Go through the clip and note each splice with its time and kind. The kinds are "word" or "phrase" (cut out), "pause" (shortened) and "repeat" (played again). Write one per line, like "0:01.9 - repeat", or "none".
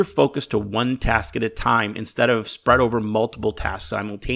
none